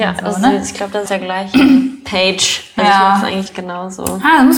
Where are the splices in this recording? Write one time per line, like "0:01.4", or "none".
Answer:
0:01.1
0:03.5